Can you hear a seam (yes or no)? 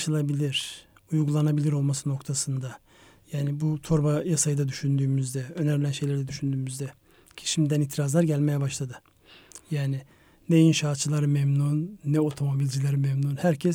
no